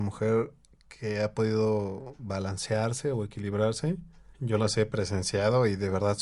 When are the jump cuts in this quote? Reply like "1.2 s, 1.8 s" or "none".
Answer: 4.3 s